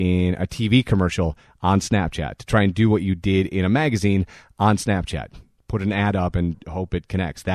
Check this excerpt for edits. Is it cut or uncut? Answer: uncut